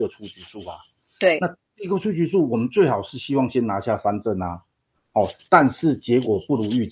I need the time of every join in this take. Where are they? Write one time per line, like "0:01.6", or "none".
none